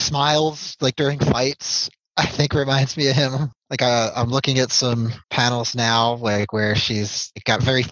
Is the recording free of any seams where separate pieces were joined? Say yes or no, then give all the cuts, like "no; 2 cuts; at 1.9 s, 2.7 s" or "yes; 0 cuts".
no; 1 cut; at 5.2 s